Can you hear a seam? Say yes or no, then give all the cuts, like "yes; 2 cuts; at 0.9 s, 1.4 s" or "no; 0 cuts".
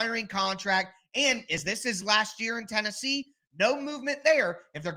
no; 0 cuts